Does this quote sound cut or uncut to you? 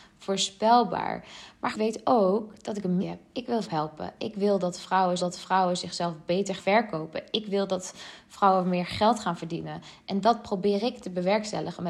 cut